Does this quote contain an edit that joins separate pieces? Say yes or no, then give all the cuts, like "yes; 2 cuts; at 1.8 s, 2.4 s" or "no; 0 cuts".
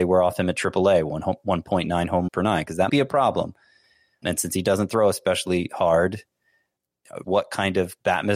yes; 4 cuts; at 2.3 s, 2.9 s, 4.2 s, 7.2 s